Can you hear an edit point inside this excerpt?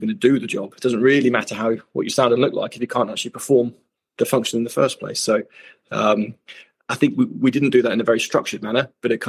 yes; 1 cut; at 6.8 s

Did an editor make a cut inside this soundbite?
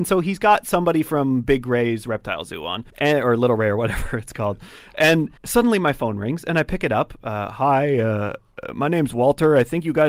yes; 2 cuts; at 2.9 s, 5.4 s

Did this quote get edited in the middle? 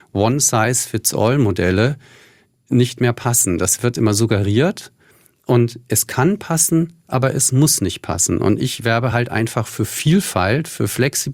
no; 0 cuts

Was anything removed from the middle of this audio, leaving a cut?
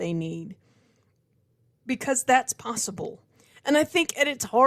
no; 0 cuts

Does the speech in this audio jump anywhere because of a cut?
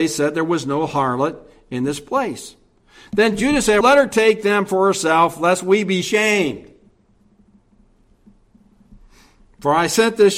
yes; 1 cut; at 3.8 s

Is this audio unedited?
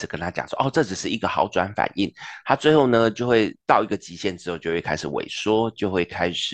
no; 1 cut; at 3.6 s

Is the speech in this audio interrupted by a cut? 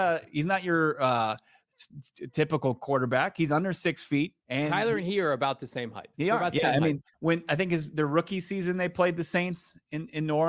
yes; 3 cuts; at 4.4 s, 6.1 s, 7.1 s

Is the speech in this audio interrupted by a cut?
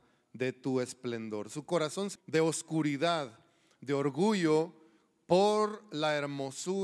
yes; 1 cut; at 2.2 s

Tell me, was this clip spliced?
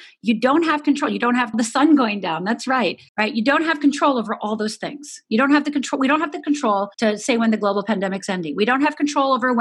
yes; 3 cuts; at 1.5 s, 3.1 s, 6.9 s

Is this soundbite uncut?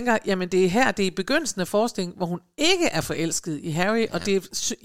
yes; 0 cuts

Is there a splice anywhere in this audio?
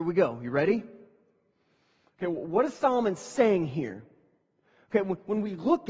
no; 0 cuts

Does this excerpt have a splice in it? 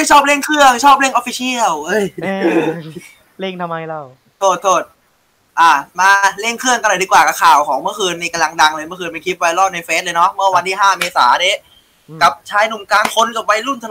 no; 0 cuts

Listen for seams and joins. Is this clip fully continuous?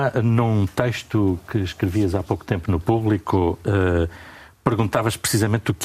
yes; 0 cuts

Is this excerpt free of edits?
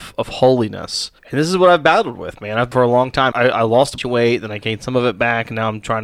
no; 4 cuts; at 1.2 s, 2.7 s, 3.3 s, 4.0 s

